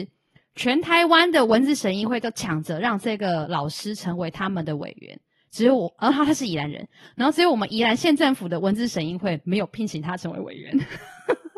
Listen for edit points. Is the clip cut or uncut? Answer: uncut